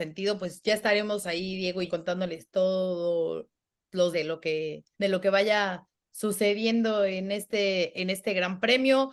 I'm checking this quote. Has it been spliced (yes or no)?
yes